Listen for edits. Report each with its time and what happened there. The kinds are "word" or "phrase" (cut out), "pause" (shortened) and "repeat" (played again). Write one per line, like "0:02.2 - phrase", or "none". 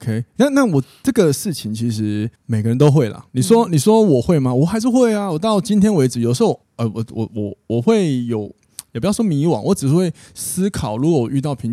0:02.4 - pause
0:03.3 - pause
0:06.6 - pause